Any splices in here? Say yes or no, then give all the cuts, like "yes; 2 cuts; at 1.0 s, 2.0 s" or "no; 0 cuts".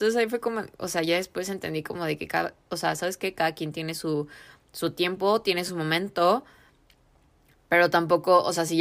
no; 0 cuts